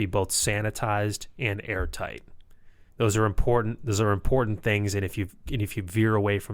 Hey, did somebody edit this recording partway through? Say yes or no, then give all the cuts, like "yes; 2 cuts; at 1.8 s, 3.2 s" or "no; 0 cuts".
yes; 1 cut; at 2.9 s